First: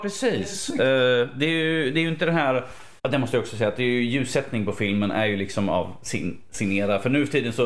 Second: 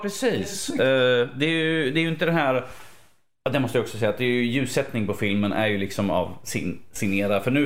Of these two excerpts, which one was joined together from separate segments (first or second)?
first